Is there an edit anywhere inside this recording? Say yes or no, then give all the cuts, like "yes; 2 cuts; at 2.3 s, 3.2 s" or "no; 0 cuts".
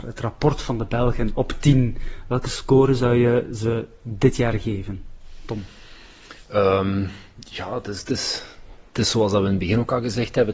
no; 0 cuts